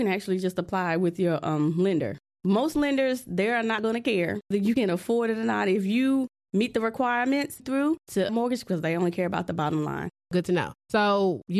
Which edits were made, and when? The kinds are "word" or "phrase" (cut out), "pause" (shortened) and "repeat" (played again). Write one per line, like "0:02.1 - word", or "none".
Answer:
0:04.5 - word
0:07.6 - phrase
0:08.3 - phrase